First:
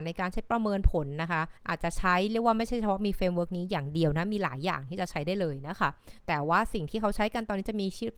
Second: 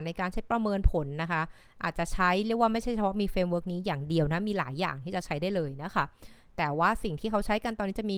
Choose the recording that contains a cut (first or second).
first